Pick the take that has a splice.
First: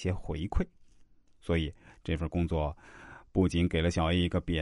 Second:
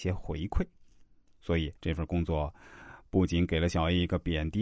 second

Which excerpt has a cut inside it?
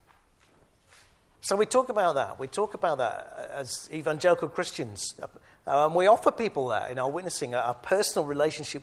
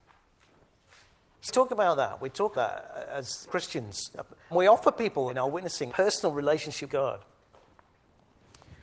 second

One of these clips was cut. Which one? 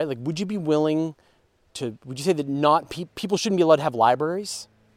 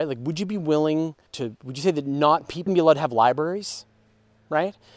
second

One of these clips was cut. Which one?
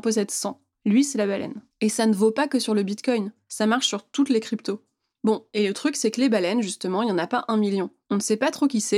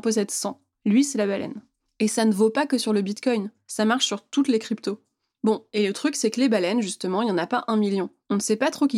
first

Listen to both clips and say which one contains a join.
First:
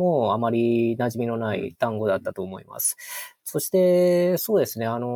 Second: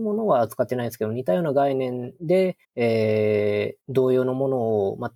second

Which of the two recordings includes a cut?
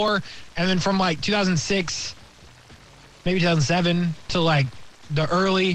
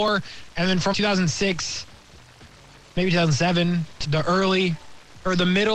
second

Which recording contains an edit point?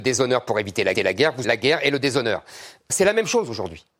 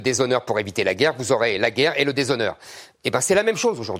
first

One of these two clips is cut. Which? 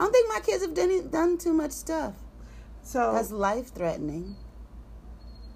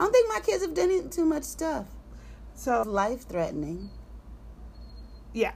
second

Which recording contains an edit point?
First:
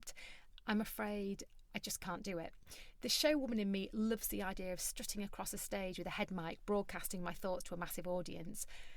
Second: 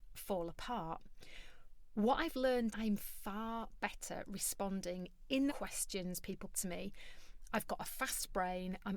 second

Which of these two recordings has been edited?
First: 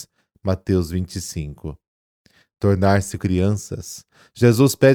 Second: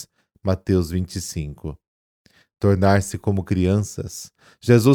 first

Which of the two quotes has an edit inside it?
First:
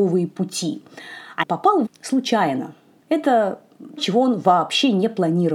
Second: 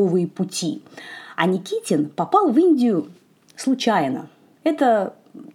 first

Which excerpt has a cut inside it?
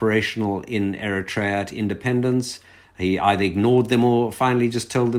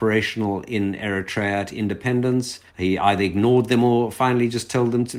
second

